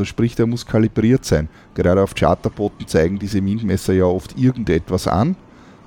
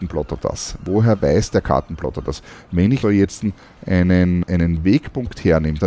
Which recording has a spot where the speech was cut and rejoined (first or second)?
second